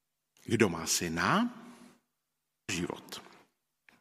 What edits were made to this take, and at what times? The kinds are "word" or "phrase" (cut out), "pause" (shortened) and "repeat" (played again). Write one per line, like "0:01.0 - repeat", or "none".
0:02.7 - word